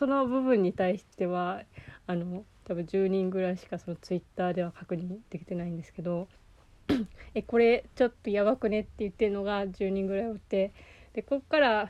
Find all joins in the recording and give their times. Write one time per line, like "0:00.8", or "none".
0:01.1
0:06.4